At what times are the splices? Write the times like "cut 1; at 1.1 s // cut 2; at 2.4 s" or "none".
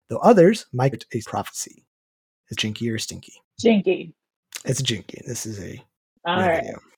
cut 1; at 0.9 s // cut 2; at 1.2 s // cut 3; at 2.5 s // cut 4; at 3.5 s